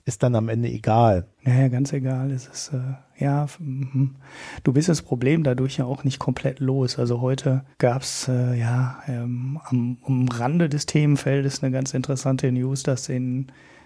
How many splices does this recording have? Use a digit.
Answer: 2